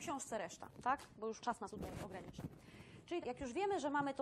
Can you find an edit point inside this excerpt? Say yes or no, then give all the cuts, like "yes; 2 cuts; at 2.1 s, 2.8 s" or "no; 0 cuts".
yes; 3 cuts; at 1.4 s, 1.7 s, 3.2 s